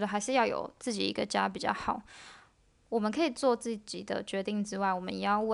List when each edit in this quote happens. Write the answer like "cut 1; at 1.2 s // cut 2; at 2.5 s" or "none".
none